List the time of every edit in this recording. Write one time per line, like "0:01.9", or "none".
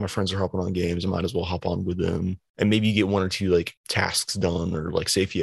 0:03.8